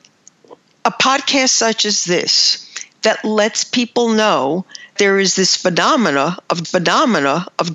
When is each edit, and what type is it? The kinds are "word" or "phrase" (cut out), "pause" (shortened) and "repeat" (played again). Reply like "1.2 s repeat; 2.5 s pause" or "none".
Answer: 5.0 s word; 6.6 s repeat